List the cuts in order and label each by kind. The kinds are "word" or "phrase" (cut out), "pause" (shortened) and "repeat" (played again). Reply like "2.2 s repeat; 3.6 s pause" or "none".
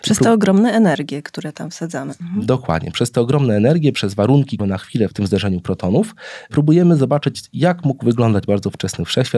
4.6 s phrase